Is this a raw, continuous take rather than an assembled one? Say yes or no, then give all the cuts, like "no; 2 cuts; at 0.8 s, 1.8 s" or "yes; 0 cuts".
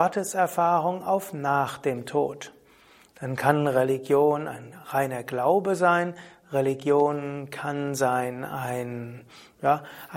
yes; 0 cuts